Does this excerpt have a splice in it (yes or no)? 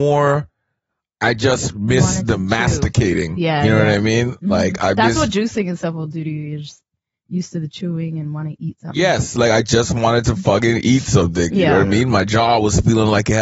no